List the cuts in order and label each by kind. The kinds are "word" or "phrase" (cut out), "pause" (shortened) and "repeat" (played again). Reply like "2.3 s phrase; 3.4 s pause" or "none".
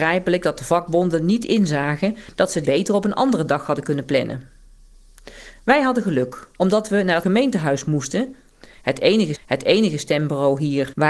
2.6 s phrase; 6.5 s pause; 7.2 s word; 9.3 s repeat